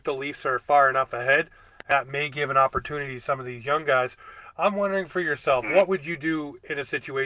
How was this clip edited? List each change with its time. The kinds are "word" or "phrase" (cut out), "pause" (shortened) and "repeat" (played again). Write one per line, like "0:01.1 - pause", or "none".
none

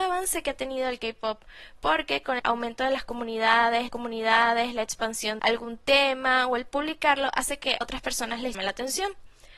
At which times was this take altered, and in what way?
0:02.4 - word
0:03.9 - repeat
0:05.4 - phrase
0:07.8 - word
0:08.5 - word

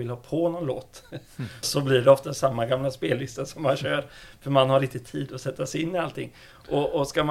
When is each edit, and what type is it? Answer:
0:01.6 - word

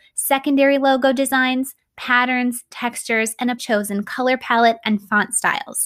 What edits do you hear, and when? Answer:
0:03.6 - word

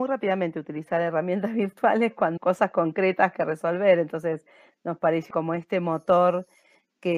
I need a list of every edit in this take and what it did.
0:02.4 - word
0:05.3 - word

